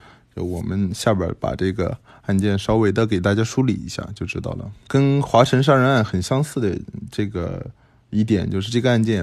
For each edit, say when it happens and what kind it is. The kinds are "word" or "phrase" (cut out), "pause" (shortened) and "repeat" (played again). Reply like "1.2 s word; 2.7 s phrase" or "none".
4.9 s phrase

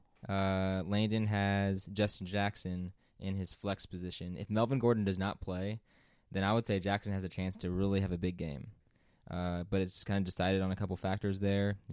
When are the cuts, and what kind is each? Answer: none

